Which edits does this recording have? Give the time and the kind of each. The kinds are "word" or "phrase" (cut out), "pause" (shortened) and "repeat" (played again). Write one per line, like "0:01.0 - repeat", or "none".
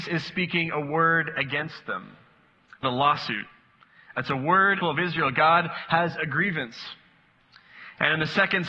0:02.8 - phrase
0:04.8 - phrase